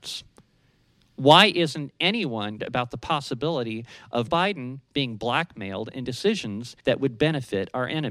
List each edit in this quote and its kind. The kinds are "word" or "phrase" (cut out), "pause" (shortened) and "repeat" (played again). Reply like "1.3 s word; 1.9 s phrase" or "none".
2.6 s word; 4.3 s word; 6.0 s word; 6.8 s pause